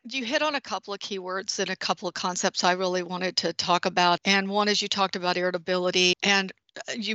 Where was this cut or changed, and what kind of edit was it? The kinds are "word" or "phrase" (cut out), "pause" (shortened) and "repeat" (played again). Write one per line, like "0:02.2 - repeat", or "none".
0:04.2 - word
0:06.1 - word

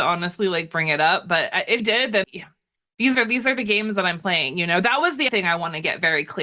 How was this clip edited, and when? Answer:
0:01.8 - word
0:02.2 - word
0:03.1 - word
0:05.3 - word

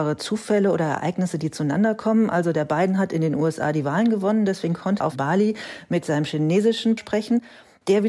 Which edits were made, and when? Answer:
0:05.0 - word
0:07.0 - word

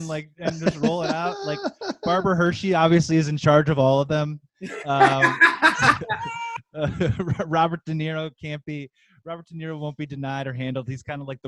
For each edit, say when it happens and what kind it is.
none

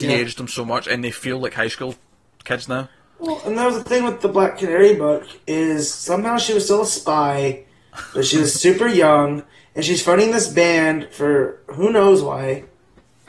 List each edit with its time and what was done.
none

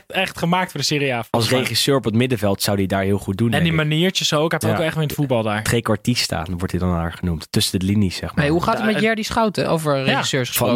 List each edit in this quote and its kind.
0:04.6 - word

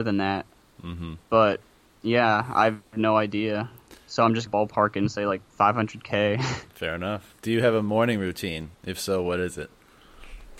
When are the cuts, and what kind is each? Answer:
0:04.5 - word
0:05.5 - pause
0:07.4 - pause
0:08.7 - pause

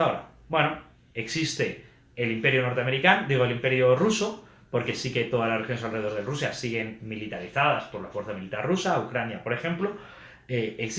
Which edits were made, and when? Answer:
none

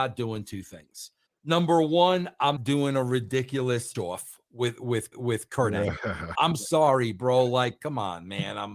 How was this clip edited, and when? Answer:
0:01.3 - pause
0:02.6 - word
0:03.9 - word
0:05.1 - repeat
0:06.3 - word

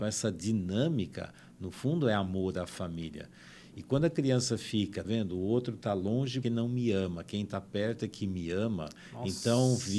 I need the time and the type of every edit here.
0:05.0 - word
0:06.4 - word

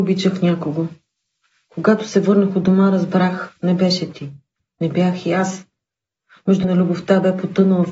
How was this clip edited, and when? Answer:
0:06.6 - word

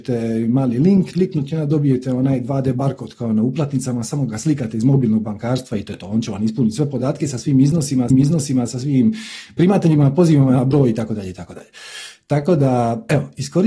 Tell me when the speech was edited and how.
0:01.1 - phrase
0:08.1 - repeat

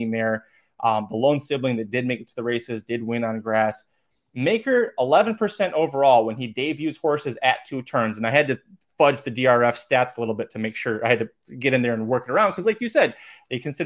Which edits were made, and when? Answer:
none

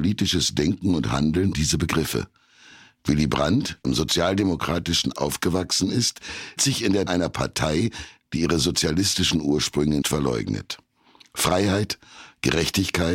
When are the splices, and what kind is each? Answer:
0:01.5 - word
0:03.8 - word
0:05.1 - word
0:06.6 - word
0:07.1 - word
0:10.0 - word

